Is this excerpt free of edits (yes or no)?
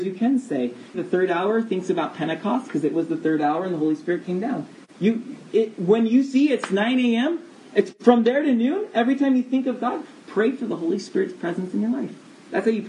no